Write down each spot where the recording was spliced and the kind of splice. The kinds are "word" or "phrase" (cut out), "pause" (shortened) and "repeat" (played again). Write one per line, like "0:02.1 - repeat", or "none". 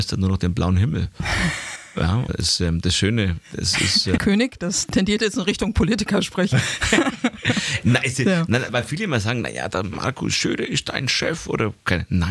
0:02.3 - word
0:04.2 - word
0:08.7 - word